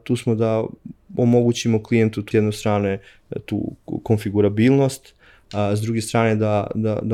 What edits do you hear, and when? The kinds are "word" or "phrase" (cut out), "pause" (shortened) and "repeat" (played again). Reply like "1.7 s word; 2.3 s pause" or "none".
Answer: 2.3 s word